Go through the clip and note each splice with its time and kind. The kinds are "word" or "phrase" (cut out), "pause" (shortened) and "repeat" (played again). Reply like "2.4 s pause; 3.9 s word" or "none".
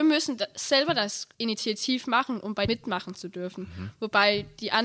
1.3 s pause; 2.7 s word

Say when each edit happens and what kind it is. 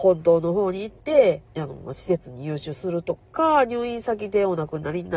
1.5 s pause

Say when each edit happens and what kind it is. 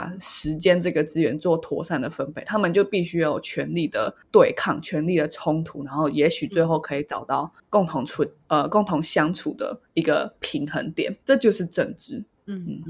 11.2 s pause

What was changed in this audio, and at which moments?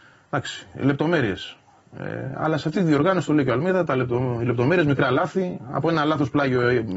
none

